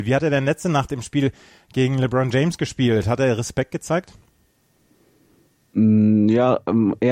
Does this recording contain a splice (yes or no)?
no